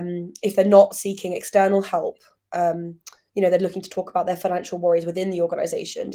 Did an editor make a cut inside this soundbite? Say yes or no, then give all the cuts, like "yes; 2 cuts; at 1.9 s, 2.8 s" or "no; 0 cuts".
no; 0 cuts